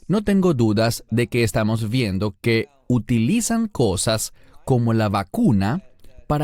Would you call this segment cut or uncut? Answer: uncut